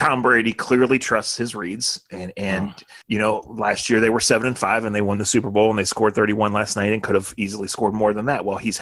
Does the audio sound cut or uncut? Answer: cut